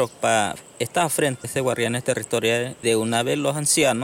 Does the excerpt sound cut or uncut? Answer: cut